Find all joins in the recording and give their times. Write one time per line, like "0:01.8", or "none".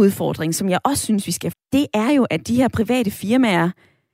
0:01.5